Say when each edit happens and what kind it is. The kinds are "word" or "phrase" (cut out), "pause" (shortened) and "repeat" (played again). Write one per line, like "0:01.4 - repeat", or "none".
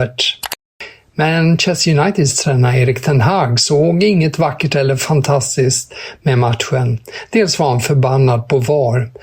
none